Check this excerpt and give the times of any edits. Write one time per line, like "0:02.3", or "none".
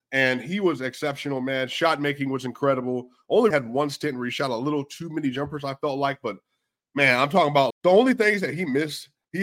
0:03.5
0:07.7